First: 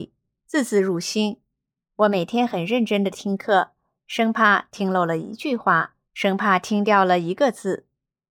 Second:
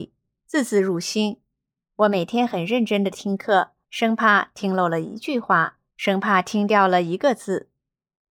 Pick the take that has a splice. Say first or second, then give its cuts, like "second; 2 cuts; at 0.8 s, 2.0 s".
second; 1 cut; at 3.8 s